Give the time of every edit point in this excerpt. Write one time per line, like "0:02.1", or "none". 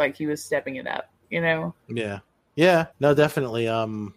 0:01.8
0:02.9